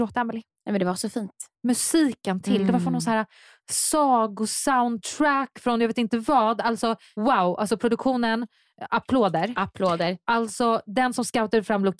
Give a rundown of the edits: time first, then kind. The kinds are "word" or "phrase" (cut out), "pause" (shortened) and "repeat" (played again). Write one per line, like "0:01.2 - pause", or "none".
none